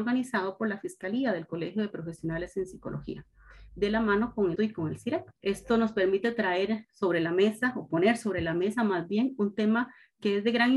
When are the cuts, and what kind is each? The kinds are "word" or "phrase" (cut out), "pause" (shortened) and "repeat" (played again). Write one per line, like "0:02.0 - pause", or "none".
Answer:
0:04.6 - word
0:05.4 - pause